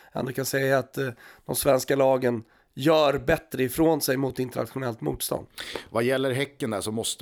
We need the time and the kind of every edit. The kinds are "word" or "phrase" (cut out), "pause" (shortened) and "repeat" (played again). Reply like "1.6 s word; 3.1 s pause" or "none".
none